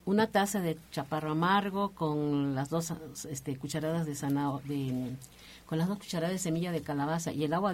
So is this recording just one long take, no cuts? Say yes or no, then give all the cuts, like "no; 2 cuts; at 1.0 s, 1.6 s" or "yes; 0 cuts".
yes; 0 cuts